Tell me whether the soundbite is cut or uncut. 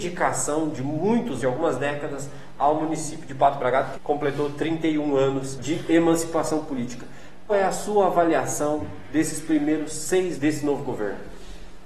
cut